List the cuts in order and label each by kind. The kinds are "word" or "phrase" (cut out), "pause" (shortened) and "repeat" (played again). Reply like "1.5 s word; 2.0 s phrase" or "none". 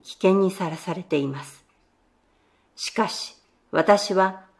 none